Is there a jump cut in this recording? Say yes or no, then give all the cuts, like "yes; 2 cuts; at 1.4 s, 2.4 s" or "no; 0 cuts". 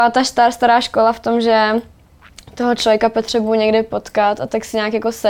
no; 0 cuts